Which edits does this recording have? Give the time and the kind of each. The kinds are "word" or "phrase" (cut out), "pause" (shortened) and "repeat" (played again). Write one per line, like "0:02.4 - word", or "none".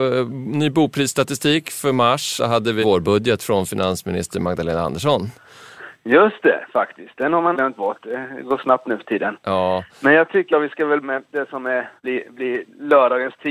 0:02.4 - phrase
0:02.8 - word
0:07.5 - word
0:10.5 - word
0:11.0 - word
0:12.0 - pause